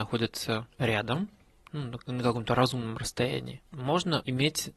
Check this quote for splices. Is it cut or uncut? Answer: uncut